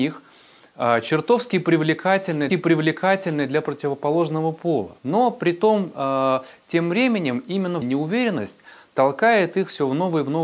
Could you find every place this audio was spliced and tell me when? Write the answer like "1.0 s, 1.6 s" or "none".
2.5 s, 5.0 s, 7.8 s